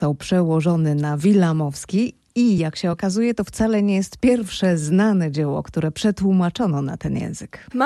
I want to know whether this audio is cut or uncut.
uncut